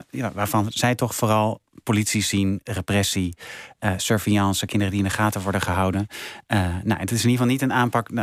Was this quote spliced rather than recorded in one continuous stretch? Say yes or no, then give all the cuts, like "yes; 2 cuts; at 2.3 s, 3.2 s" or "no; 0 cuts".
no; 0 cuts